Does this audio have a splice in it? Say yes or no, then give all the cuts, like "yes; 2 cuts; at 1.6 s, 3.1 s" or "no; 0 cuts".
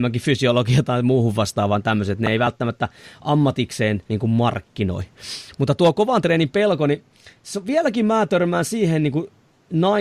yes; 1 cut; at 4.1 s